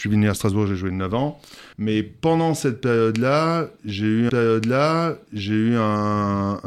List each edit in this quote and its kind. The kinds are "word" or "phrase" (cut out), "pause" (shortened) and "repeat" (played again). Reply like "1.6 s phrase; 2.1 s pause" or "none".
1.7 s pause; 4.3 s repeat